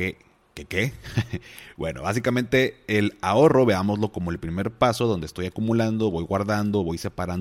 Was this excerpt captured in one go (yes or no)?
yes